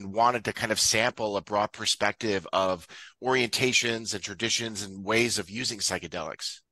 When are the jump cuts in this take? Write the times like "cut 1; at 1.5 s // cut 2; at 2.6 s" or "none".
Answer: none